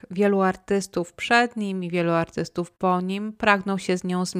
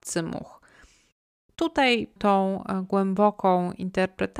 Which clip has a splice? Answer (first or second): second